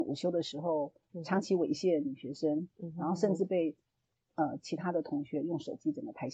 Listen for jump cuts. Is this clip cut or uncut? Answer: uncut